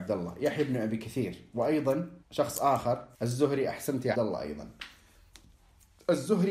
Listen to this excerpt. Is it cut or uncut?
cut